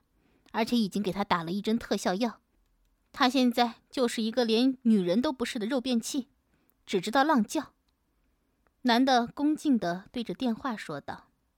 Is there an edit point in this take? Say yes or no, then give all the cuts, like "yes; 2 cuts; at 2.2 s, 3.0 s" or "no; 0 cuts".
no; 0 cuts